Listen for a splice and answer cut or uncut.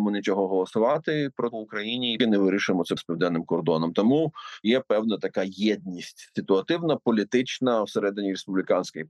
cut